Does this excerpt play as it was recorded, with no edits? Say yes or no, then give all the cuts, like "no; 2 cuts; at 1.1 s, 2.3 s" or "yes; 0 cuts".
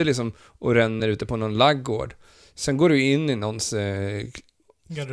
yes; 0 cuts